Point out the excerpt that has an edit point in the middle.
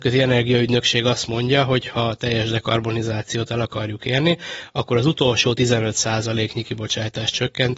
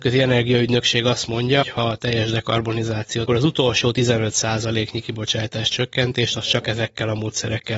second; 2 cuts; at 1.6 s, 3.3 s

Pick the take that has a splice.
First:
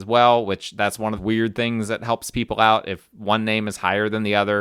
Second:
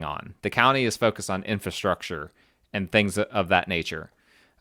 first; 1 cut; at 1.2 s

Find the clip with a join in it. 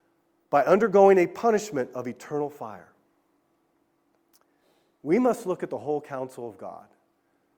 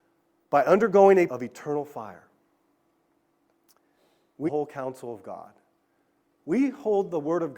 second; 2 cuts; at 1.3 s, 4.5 s

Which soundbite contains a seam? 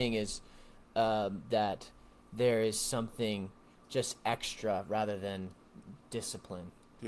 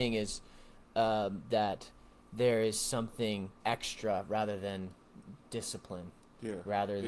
second; 1 cut; at 3.6 s

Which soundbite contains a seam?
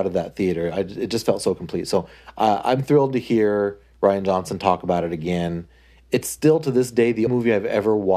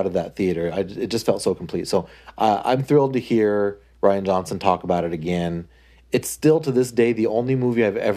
first; 1 cut; at 7.3 s

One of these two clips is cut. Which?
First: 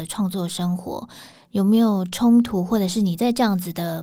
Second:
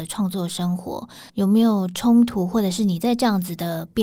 second; 1 cut; at 1.3 s

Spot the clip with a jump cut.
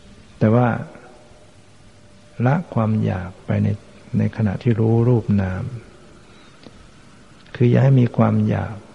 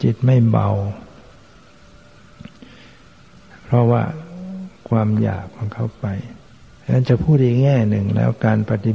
second; 1 cut; at 6.5 s

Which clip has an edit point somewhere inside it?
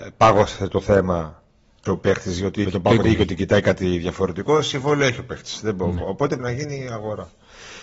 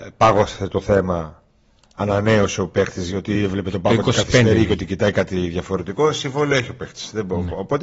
first; 4 cuts; at 1.9 s, 2.6 s, 3.0 s, 6.4 s

